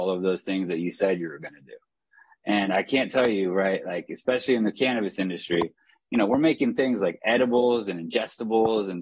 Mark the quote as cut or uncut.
uncut